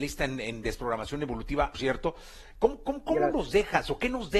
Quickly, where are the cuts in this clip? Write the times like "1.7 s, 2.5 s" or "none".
1.7 s